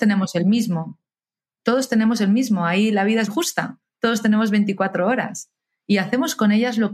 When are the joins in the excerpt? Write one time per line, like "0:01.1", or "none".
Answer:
0:03.3

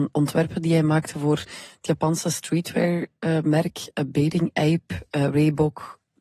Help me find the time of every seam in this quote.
none

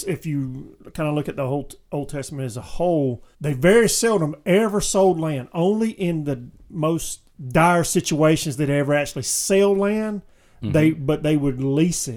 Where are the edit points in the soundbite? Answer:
0:03.3
0:07.3

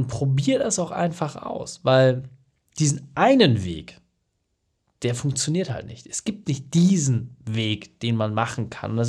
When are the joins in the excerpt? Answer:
none

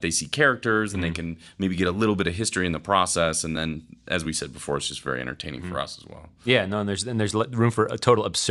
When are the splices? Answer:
none

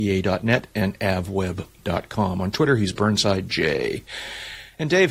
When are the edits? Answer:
none

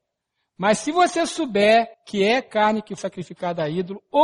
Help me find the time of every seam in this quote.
0:01.9
0:03.0

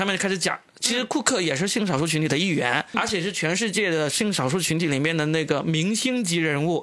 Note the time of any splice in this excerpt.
0:02.9

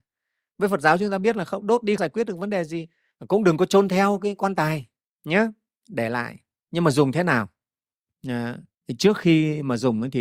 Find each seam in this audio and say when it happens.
0:02.0

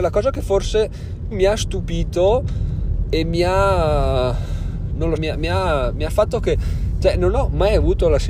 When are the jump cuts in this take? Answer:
0:01.3
0:05.2
0:06.1

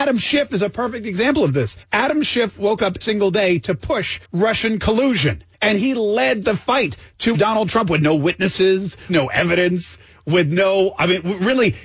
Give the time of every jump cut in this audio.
0:01.8
0:03.0
0:04.2
0:05.5
0:07.3
0:09.1

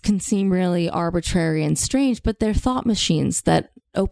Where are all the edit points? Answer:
none

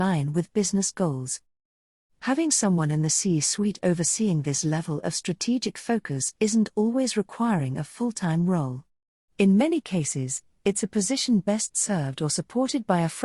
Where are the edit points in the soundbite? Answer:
none

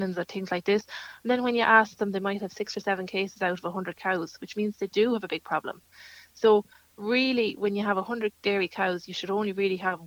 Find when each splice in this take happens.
none

